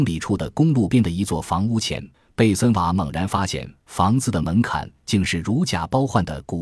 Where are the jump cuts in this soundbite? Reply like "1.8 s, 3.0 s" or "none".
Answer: 2.1 s